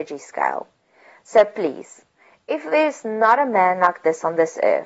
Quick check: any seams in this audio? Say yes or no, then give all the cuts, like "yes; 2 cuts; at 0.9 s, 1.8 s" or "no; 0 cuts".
no; 0 cuts